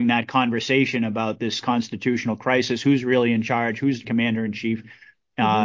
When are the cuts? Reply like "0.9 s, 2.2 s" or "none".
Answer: 4.0 s